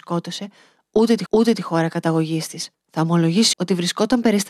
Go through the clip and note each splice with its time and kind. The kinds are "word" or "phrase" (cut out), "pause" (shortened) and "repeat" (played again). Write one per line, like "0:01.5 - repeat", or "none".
0:01.3 - repeat
0:02.7 - pause
0:03.5 - word